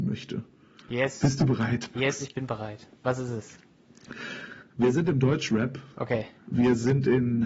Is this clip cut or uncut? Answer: cut